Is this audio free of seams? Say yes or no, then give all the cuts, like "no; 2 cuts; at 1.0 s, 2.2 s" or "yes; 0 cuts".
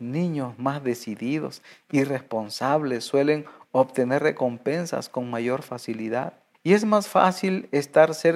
no; 1 cut; at 6.5 s